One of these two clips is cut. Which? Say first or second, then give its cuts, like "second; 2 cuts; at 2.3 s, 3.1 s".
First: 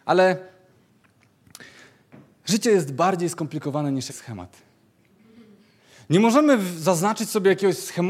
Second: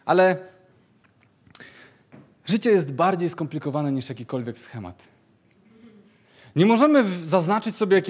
first; 1 cut; at 4.1 s